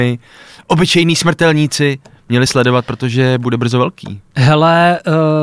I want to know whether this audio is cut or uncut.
uncut